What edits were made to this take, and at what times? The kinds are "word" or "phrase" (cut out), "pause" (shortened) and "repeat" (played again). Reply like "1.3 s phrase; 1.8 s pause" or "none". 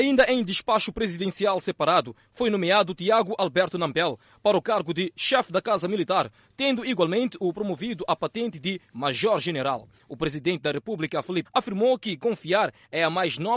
11.4 s word

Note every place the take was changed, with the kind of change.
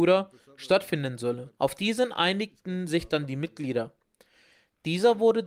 1.5 s pause

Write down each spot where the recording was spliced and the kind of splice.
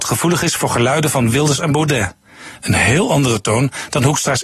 none

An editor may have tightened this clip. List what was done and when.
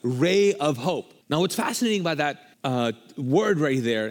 1.2 s pause; 2.5 s pause

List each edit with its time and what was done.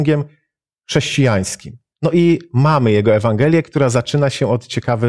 1.9 s pause

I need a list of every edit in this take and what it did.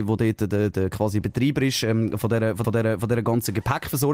2.6 s repeat

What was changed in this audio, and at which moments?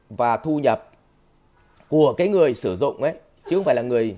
none

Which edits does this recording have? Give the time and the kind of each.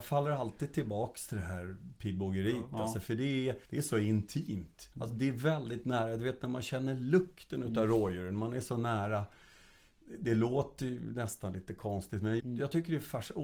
3.6 s pause; 4.9 s pause; 12.4 s word

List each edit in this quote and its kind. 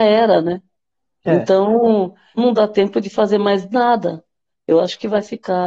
2.4 s word

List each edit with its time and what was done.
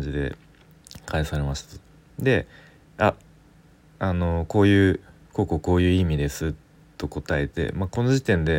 none

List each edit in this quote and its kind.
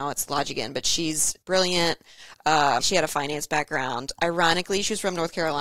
1.4 s pause; 2.8 s word

